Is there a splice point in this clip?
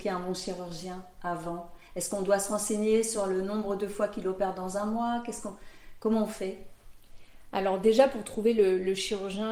no; 0 cuts

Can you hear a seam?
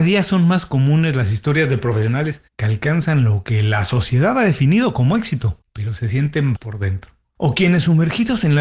yes; 3 cuts; at 2.5 s, 5.6 s, 6.5 s

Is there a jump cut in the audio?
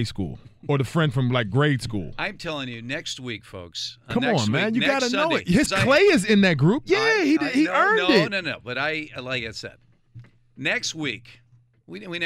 yes; 1 cut; at 5.7 s

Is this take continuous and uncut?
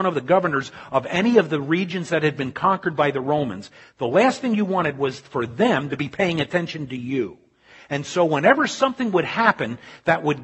yes; 0 cuts

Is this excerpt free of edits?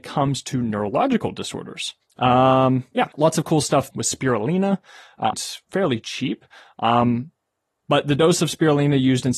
no; 4 cuts; at 2.0 s, 3.1 s, 3.9 s, 5.3 s

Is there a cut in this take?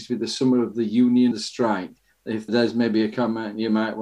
yes; 2 cuts; at 1.3 s, 2.5 s

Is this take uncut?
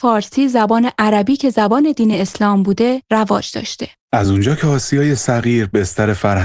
yes; 0 cuts

